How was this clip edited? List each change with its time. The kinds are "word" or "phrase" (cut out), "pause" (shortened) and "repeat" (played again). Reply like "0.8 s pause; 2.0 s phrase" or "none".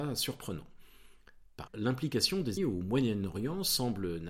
1.7 s word; 2.6 s word